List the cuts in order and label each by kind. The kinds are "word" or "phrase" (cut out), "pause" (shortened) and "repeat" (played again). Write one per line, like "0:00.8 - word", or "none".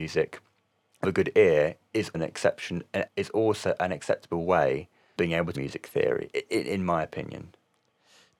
0:01.0 - word
0:02.1 - word
0:03.1 - word
0:05.2 - word
0:05.5 - word